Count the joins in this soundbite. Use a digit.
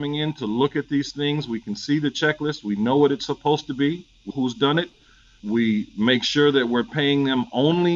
1